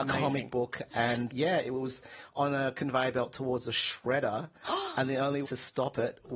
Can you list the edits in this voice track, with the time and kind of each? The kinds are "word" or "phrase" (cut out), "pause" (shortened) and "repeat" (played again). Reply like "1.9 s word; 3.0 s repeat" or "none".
1.3 s word; 5.4 s word